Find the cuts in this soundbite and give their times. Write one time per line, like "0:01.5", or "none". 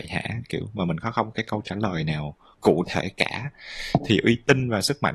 0:01.3

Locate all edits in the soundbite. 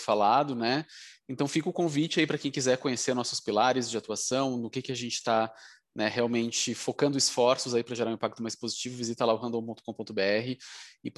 none

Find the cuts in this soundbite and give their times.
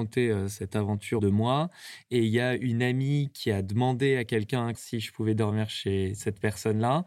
0:01.2
0:04.7

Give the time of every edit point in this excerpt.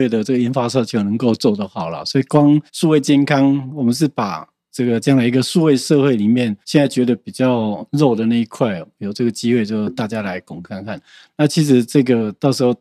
0:02.7
0:06.6

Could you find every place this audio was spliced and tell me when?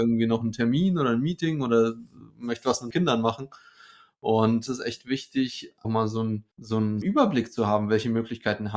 0:02.3
0:02.9
0:04.7
0:05.8
0:06.5
0:07.0

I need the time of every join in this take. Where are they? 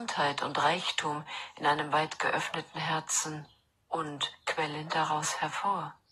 none

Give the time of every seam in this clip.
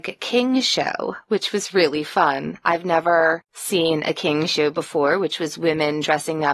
0:03.4

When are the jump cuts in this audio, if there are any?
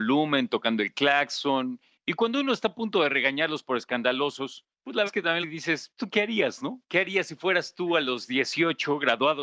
0:04.7
0:05.1
0:05.4
0:06.0
0:06.9

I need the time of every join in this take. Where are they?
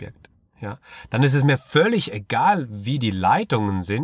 none

